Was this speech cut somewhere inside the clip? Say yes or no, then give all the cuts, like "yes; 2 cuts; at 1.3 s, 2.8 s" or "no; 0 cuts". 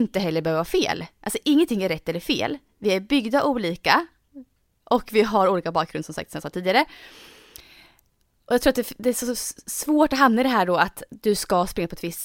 no; 0 cuts